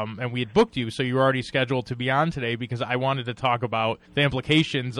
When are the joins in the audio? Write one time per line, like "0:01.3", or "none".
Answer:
0:04.1